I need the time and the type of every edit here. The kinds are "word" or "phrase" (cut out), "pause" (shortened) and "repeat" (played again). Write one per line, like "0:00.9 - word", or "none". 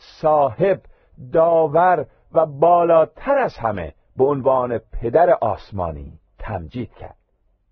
0:06.3 - pause